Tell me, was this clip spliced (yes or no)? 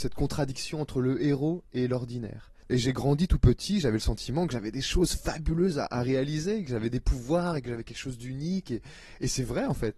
yes